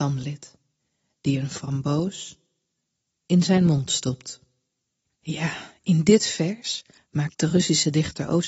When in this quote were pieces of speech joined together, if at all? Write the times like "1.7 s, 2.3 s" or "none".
5.0 s, 7.0 s

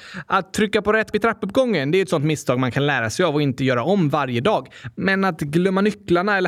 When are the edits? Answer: 1.1 s

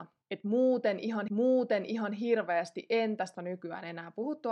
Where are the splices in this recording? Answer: 1.3 s, 3.3 s

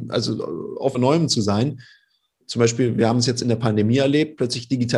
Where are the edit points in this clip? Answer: 0.9 s

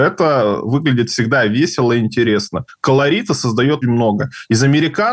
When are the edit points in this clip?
3.8 s

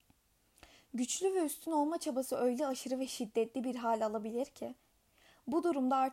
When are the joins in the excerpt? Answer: none

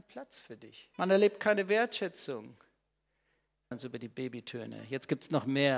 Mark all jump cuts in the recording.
0.9 s, 3.7 s

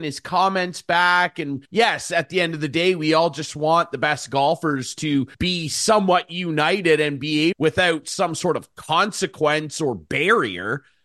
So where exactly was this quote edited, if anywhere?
1.7 s, 5.3 s, 7.5 s

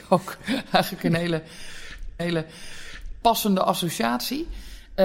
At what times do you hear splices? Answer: 2.2 s

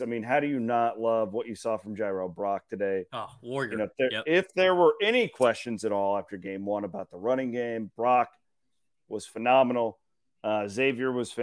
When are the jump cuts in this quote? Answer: none

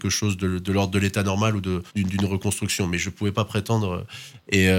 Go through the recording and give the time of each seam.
1.9 s

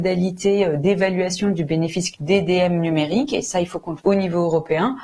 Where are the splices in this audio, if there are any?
2.1 s, 4.0 s

